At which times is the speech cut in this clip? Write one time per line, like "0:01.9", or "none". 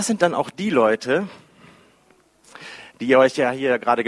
0:02.9